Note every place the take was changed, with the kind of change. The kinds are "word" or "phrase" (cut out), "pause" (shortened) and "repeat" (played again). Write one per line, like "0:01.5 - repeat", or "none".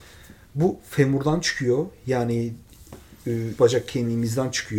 0:03.6 - word